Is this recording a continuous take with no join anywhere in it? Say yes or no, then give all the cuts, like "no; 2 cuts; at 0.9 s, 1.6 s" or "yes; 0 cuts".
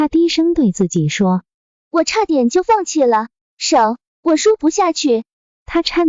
yes; 0 cuts